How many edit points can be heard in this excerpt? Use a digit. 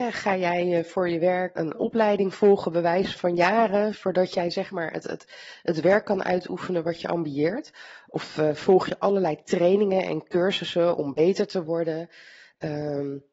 2